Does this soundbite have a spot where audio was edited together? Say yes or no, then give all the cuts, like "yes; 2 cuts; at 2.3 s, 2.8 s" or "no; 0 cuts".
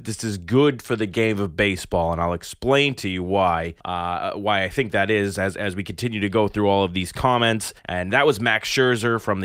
yes; 2 cuts; at 3.8 s, 7.8 s